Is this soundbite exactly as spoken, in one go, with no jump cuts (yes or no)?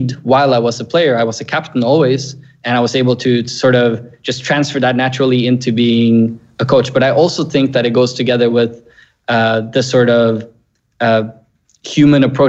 yes